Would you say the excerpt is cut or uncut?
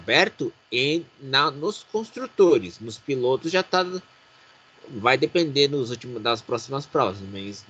uncut